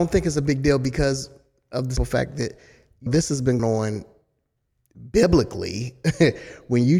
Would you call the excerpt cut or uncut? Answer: cut